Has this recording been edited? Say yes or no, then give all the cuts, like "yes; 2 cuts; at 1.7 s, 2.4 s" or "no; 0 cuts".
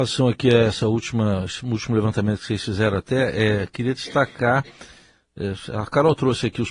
no; 0 cuts